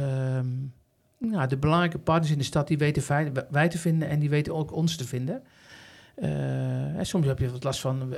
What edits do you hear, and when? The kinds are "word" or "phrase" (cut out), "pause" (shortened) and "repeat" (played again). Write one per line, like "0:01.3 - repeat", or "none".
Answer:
none